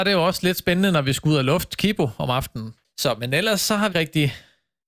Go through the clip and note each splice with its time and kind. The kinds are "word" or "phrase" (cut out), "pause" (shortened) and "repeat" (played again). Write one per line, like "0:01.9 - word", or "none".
0:03.9 - word